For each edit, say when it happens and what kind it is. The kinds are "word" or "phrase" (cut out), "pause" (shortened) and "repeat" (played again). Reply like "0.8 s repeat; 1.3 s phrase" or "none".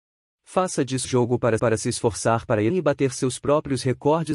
1.0 s word; 1.6 s repeat; 2.7 s word